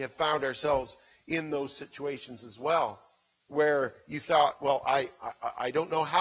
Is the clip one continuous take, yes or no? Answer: yes